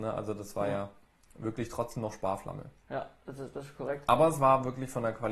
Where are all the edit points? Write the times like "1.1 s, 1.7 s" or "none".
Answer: none